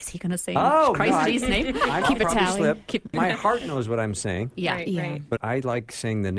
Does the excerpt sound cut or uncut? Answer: cut